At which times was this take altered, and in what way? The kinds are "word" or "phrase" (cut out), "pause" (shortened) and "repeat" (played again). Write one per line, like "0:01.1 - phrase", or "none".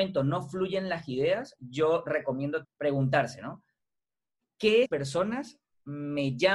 0:02.6 - word
0:04.9 - phrase

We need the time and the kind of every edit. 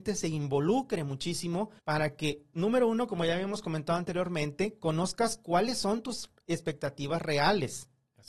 0:01.8 - pause

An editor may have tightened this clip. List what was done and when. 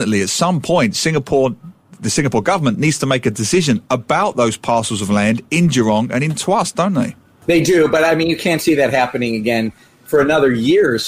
none

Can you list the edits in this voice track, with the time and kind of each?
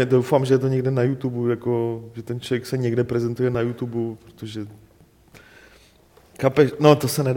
none

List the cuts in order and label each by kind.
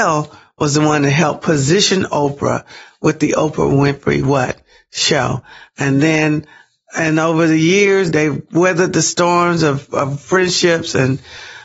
0:08.1 - word

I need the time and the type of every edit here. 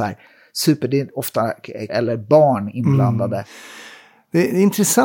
0:01.9 - word

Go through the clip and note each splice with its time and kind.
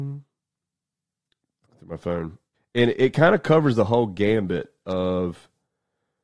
0:02.5 - pause

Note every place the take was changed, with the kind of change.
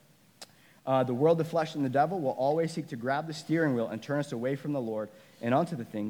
none

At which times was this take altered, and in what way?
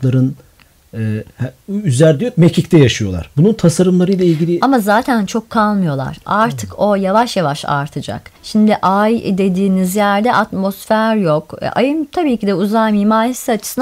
0:08.4 - pause

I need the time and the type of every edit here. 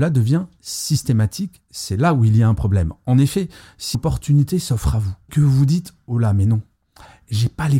0:03.9 - word
0:05.3 - word

